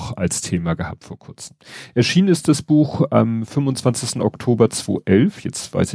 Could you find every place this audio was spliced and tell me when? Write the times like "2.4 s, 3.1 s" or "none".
none